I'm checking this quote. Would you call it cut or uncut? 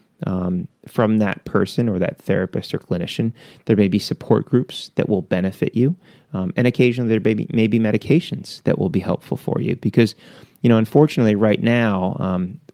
uncut